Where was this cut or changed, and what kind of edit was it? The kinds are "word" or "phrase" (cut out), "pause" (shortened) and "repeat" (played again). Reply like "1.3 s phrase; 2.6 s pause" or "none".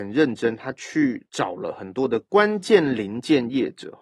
none